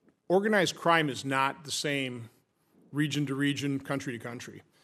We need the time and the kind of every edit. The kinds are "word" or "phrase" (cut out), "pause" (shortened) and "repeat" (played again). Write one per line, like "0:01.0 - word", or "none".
none